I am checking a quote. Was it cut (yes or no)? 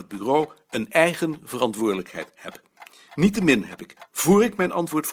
no